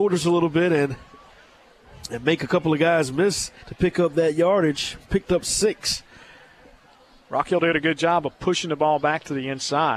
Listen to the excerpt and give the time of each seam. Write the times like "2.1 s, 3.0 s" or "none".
3.6 s